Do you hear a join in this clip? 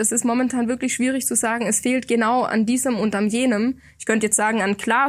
no; 0 cuts

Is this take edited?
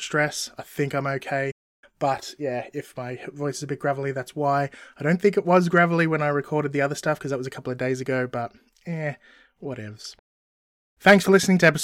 no; 0 cuts

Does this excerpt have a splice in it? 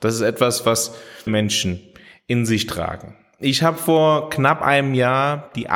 yes; 1 cut; at 1.3 s

